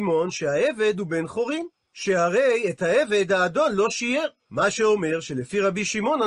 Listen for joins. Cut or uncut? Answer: uncut